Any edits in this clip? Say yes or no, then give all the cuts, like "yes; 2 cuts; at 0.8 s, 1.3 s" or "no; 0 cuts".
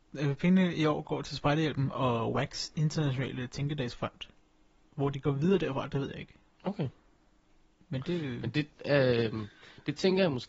no; 0 cuts